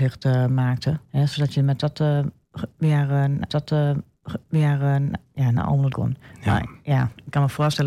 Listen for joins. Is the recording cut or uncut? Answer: cut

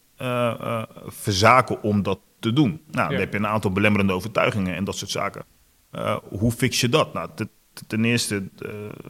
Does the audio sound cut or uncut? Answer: uncut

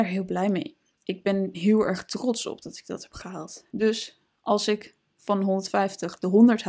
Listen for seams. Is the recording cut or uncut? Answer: cut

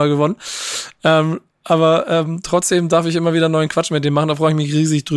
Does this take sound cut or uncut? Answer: uncut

